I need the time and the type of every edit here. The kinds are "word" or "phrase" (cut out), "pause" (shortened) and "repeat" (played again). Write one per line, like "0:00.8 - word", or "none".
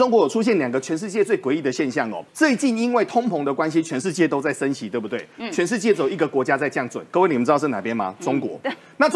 0:02.3 - pause

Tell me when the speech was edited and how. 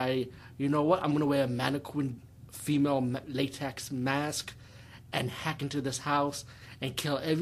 none

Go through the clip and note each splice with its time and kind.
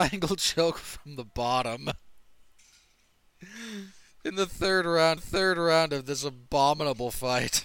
0:05.2 - repeat

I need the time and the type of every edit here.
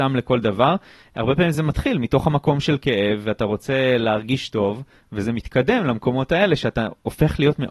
none

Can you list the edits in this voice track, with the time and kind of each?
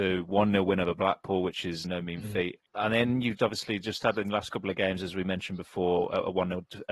0:01.8 - word
0:02.7 - pause
0:03.4 - word

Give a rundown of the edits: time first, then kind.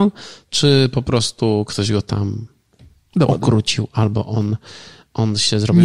none

